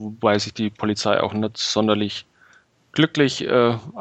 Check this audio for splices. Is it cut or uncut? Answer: uncut